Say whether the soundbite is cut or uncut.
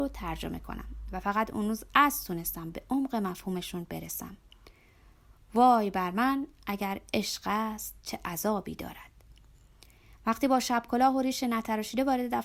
uncut